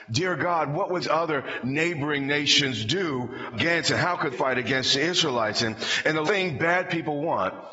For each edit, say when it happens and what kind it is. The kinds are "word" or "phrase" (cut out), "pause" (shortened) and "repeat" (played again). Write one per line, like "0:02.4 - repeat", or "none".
0:01.0 - word
0:03.5 - word
0:04.3 - word
0:06.2 - word

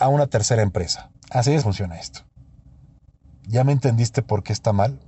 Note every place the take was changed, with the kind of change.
0:01.2 - pause
0:01.6 - word

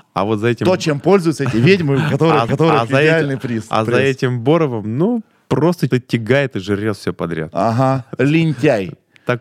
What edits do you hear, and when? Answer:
0:02.5 - repeat
0:05.9 - word

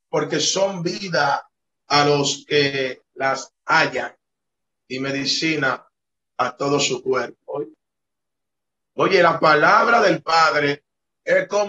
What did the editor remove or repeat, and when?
none

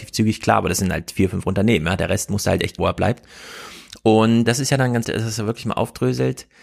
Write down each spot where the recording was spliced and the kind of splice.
0:02.8 - word
0:04.4 - word
0:05.0 - word

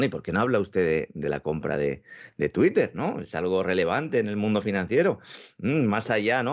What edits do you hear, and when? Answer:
none

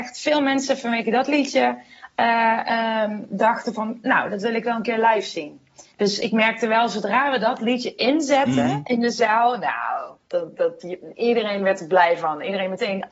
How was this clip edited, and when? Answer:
0:05.9 - pause
0:10.2 - pause

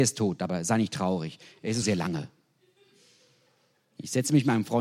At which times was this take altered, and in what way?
0:01.8 - word

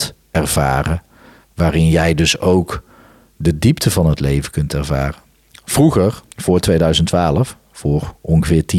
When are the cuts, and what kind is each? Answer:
0:06.3 - pause

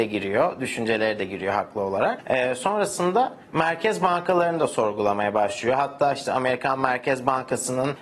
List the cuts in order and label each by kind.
0:03.4 - pause

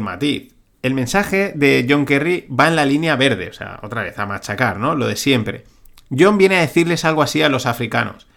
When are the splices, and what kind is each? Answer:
none

